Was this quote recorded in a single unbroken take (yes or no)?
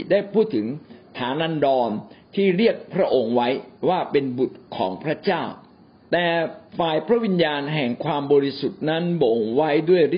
no